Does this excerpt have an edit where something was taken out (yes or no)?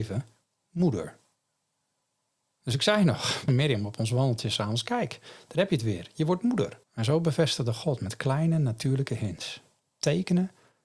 yes